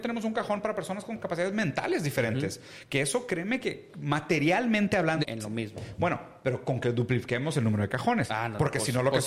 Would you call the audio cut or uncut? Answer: cut